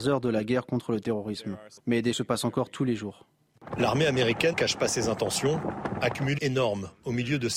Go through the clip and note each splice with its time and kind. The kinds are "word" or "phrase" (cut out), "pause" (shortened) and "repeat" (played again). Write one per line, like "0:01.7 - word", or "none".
0:01.8 - pause
0:02.1 - word
0:04.5 - word
0:06.4 - phrase